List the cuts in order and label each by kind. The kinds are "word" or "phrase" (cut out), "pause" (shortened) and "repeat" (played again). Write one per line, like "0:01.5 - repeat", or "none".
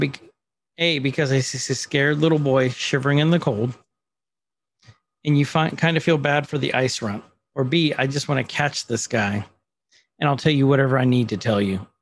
none